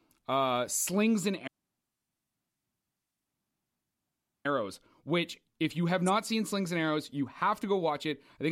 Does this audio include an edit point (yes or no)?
no